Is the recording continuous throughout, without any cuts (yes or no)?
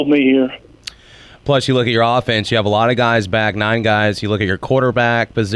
yes